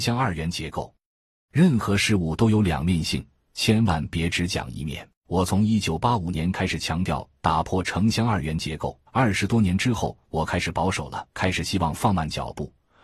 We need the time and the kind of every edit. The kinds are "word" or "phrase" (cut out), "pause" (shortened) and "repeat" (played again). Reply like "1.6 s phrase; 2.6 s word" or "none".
5.2 s pause; 9.1 s pause; 11.3 s pause

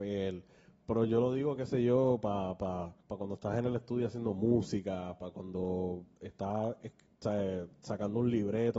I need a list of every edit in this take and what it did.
3.0 s pause

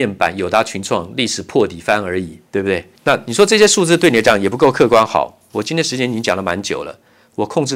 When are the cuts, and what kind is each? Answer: 2.5 s pause; 3.0 s pause

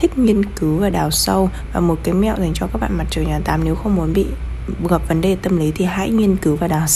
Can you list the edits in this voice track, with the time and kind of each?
none

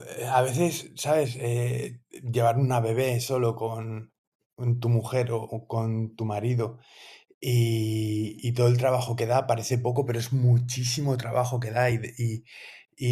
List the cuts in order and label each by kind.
none

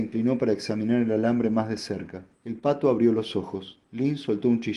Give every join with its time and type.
2.3 s pause; 3.8 s pause

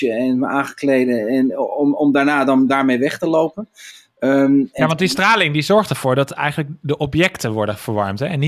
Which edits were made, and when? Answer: none

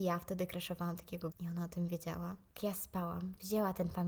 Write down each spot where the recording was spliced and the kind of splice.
1.3 s word; 2.6 s word

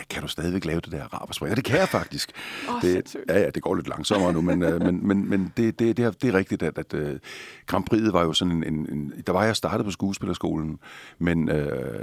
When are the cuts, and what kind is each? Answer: none

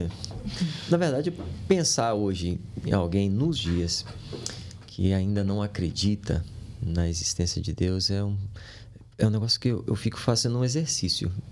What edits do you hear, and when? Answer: 3.6 s word; 9.1 s pause

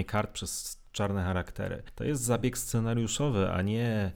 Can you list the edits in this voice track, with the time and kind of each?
none

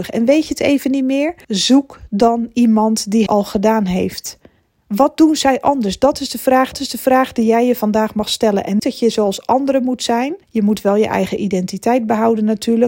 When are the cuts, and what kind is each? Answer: 1.4 s pause; 3.3 s word; 4.6 s pause; 6.7 s repeat; 8.8 s word; 10.4 s pause

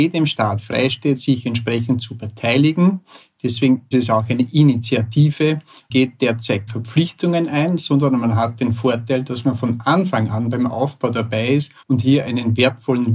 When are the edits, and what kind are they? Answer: 3.9 s word; 5.9 s phrase; 6.7 s word; 11.8 s pause

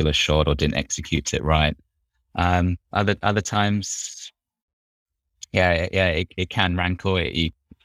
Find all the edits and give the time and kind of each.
none

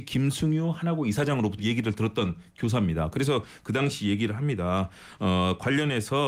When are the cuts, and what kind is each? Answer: 1.6 s word

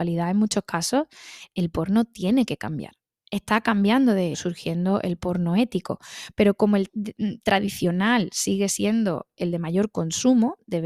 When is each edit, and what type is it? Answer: 4.3 s word; 6.9 s word

